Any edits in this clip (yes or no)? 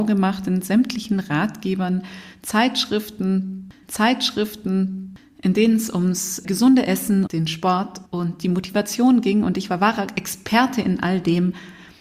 yes